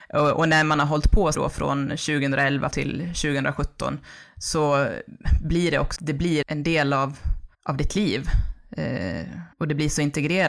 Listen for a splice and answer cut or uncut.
cut